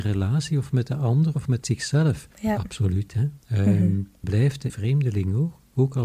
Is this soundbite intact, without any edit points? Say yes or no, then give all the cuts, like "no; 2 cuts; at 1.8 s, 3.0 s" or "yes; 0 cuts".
no; 5 cuts; at 2.3 s, 3.1 s, 3.4 s, 4.2 s, 4.7 s